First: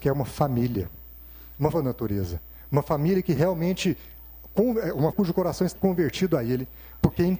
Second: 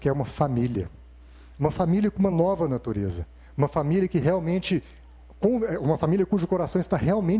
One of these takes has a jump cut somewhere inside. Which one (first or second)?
first